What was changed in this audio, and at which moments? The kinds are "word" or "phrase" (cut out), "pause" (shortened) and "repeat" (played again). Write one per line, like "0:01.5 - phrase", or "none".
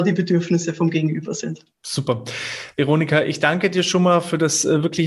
0:01.7 - pause